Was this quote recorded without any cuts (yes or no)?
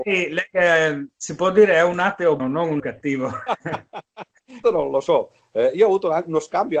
no